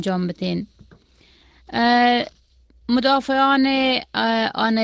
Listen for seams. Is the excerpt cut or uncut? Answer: uncut